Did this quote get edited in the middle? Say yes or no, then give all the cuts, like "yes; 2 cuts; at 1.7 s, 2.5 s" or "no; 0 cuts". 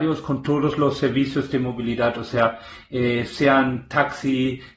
no; 0 cuts